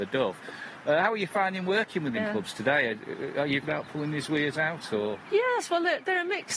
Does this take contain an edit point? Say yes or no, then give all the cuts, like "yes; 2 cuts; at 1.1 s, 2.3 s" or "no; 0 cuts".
yes; 2 cuts; at 2.1 s, 3.6 s